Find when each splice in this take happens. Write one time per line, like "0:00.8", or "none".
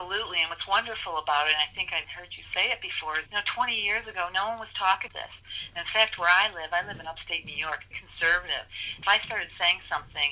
0:02.0
0:03.3
0:05.1
0:07.9
0:09.0